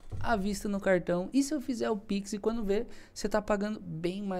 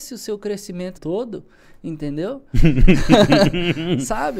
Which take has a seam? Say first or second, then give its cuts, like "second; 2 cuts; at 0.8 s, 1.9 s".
second; 1 cut; at 1.0 s